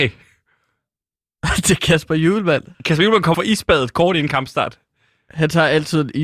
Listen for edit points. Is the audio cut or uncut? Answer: cut